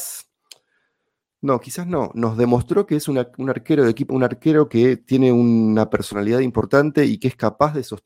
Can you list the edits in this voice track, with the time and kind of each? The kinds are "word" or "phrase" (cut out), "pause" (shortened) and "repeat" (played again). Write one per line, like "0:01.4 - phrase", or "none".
0:04.1 - word